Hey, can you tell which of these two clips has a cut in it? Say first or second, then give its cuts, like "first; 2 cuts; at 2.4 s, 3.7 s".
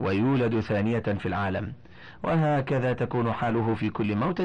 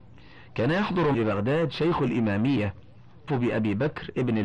second; 2 cuts; at 1.1 s, 3.3 s